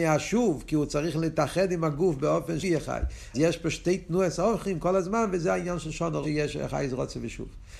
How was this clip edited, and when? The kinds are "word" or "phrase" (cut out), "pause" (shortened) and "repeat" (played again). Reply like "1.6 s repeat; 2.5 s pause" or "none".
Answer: 2.6 s word; 3.3 s word; 6.2 s phrase